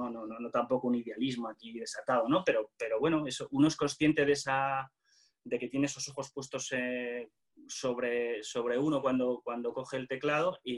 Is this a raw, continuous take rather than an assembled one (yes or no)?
yes